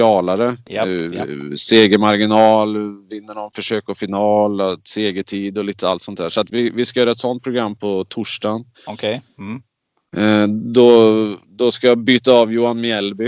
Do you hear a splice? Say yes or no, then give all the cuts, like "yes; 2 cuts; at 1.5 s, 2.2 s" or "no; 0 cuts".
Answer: yes; 1 cut; at 8.7 s